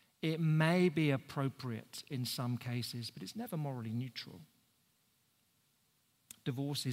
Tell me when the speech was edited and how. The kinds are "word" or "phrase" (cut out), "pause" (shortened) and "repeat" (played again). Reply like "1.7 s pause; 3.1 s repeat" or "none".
none